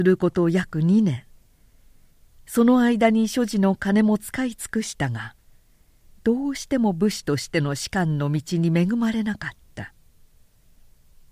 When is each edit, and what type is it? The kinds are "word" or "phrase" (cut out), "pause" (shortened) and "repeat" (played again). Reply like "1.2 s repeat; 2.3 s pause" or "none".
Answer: none

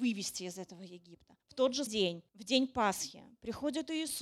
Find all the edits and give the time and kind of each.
1.4 s pause; 1.9 s word; 2.3 s pause

